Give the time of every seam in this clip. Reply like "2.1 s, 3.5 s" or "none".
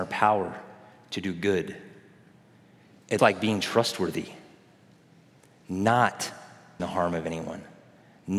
3.2 s, 6.8 s